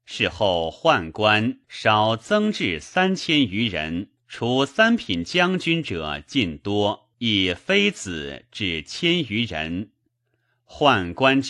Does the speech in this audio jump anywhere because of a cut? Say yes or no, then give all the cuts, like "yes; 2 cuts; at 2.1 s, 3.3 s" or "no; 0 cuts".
yes; 3 cuts; at 1.6 s, 4.2 s, 7.1 s